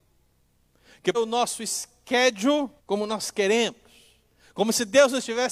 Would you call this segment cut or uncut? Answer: cut